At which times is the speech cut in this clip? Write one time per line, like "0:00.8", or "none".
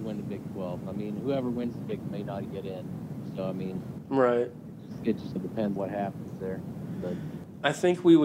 0:02.0
0:02.4
0:05.4
0:05.8